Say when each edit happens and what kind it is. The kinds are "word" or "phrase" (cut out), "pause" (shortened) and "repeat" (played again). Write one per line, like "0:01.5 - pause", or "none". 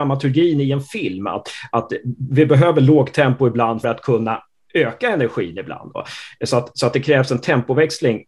0:03.8 - word